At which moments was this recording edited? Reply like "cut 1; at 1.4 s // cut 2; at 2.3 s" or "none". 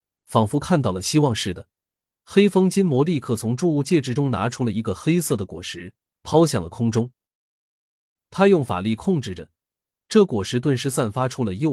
none